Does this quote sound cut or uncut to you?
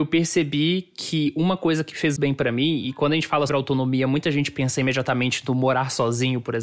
cut